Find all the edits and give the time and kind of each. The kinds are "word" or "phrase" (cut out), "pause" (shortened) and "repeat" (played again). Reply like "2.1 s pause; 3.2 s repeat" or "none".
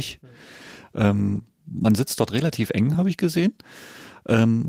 none